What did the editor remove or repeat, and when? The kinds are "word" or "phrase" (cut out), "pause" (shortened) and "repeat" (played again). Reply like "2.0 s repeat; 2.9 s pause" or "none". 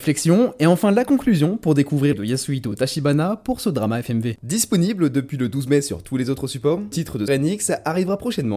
2.1 s phrase; 6.9 s word; 7.3 s word